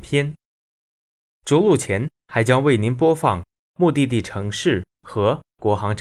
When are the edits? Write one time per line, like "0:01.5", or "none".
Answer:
0:02.2

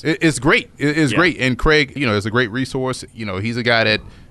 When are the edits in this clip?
0:02.0
0:03.1

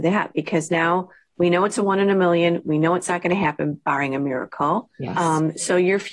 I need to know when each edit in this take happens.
0:04.9

